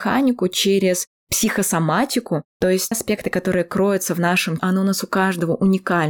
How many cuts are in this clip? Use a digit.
2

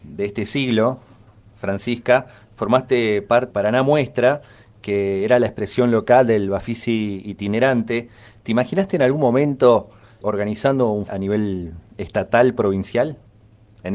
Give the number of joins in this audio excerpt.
3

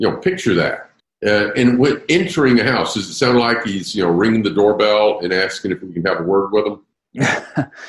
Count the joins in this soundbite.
1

